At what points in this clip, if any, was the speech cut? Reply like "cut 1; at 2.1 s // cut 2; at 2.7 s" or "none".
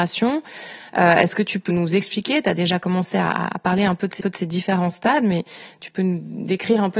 cut 1; at 1.7 s // cut 2; at 4.2 s